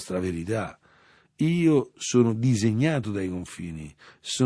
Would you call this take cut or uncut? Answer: uncut